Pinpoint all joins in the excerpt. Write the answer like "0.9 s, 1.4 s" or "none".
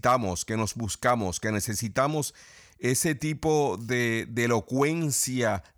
none